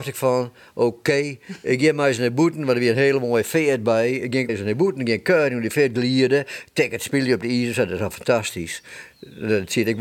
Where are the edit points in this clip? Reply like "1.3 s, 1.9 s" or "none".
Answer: 4.5 s